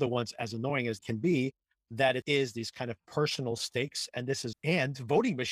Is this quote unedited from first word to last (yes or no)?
no